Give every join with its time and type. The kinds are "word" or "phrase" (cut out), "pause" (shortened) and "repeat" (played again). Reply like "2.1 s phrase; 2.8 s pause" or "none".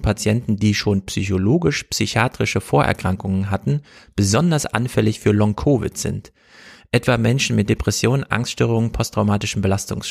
none